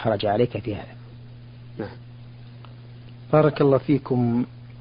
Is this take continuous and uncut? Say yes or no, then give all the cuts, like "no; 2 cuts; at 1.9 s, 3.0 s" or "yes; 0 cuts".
yes; 0 cuts